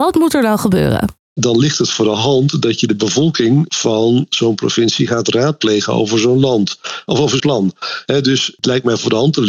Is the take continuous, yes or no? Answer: no